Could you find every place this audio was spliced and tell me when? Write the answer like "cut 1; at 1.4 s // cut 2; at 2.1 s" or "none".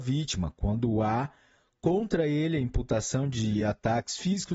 none